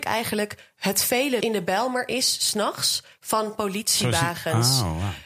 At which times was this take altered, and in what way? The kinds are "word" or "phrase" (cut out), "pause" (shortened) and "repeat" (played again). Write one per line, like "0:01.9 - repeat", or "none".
0:01.4 - phrase